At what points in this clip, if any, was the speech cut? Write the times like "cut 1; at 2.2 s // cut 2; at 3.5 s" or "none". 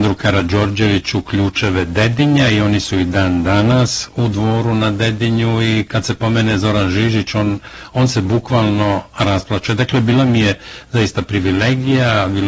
none